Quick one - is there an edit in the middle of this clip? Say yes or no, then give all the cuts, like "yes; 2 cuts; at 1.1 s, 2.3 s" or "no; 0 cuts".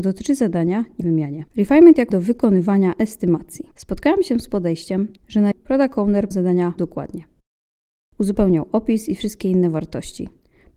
yes; 8 cuts; at 1.0 s, 1.5 s, 2.1 s, 3.7 s, 5.2 s, 5.5 s, 6.3 s, 6.8 s